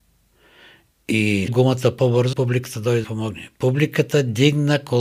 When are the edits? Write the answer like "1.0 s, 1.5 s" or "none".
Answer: 1.5 s, 2.3 s, 3.0 s

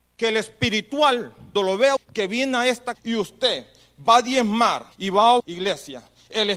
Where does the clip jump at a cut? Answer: 1.6 s, 2.0 s, 2.9 s, 4.9 s, 5.4 s

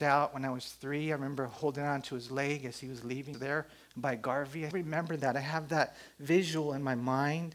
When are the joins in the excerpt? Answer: 3.3 s, 4.7 s

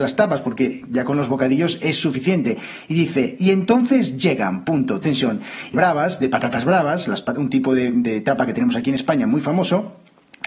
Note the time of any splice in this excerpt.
5.0 s, 5.7 s

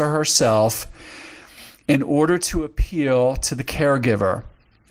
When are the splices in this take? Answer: none

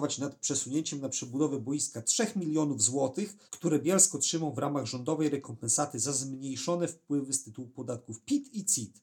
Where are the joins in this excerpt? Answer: 3.5 s

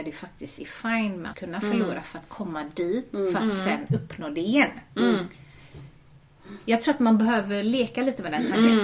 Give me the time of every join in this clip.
1.3 s

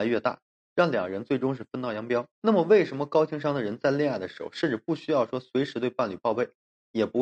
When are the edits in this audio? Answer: 2.3 s

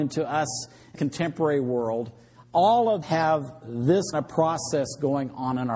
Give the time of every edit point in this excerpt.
0.9 s, 3.0 s, 4.1 s

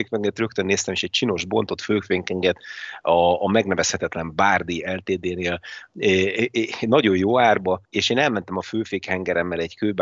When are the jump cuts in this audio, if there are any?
7.9 s

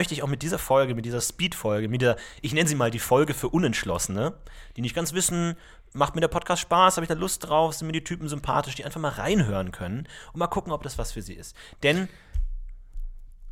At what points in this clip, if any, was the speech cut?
none

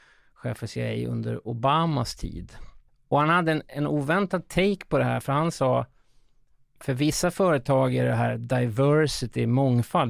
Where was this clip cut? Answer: 2.9 s

